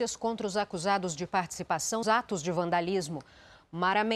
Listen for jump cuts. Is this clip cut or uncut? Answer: cut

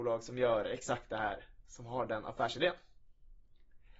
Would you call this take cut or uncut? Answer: uncut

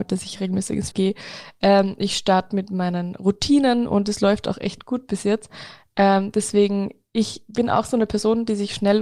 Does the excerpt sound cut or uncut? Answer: cut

